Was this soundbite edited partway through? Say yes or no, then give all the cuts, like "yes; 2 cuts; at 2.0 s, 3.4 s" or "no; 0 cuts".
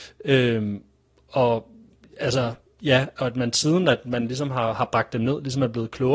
no; 0 cuts